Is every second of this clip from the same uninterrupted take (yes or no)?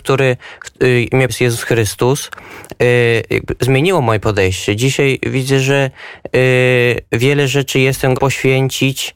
no